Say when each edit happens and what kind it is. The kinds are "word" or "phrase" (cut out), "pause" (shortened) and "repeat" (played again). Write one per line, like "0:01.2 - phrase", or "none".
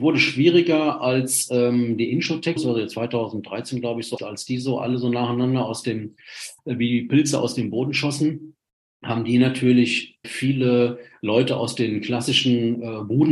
0:02.6 - word
0:04.2 - word
0:06.6 - pause
0:10.2 - word